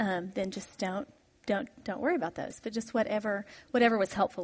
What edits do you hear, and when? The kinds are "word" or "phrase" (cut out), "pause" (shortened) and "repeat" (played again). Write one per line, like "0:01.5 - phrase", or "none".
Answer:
none